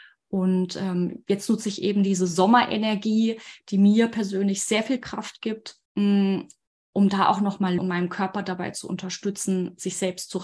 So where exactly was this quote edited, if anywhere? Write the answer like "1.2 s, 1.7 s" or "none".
5.9 s, 7.8 s